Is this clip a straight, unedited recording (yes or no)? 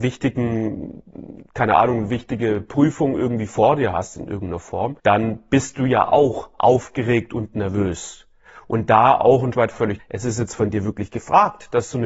no